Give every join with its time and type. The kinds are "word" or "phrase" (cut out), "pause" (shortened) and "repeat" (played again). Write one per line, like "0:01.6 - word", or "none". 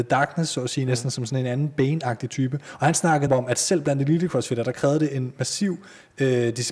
0:03.3 - word